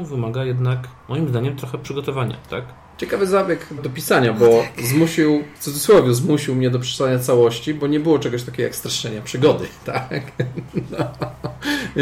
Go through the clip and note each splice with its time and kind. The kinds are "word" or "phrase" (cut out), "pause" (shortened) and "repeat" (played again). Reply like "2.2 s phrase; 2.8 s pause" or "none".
1.0 s pause; 3.8 s word; 5.6 s pause